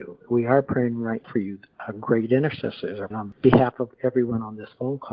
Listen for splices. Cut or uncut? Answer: cut